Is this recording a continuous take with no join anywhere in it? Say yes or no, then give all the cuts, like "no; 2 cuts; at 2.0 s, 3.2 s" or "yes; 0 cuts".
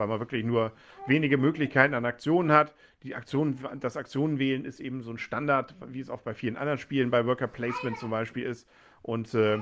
yes; 0 cuts